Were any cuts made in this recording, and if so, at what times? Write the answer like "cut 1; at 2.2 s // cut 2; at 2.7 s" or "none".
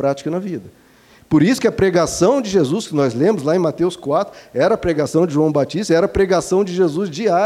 none